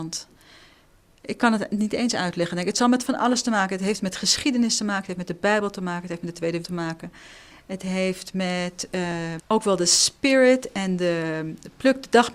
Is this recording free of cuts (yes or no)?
no